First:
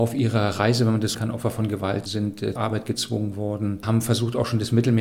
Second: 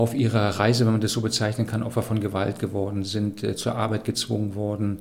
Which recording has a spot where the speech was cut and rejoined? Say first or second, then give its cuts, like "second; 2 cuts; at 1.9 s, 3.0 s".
first; 4 cuts; at 1.1 s, 2.1 s, 2.6 s, 3.8 s